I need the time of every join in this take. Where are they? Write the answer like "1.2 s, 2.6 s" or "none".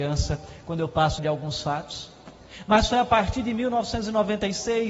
1.2 s